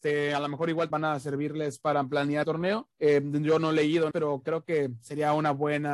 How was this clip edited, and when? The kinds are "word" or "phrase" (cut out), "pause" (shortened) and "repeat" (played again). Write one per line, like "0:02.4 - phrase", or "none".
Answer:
0:00.9 - word
0:02.4 - phrase
0:02.9 - pause
0:04.1 - word